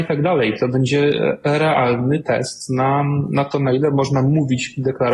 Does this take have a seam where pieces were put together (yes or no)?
no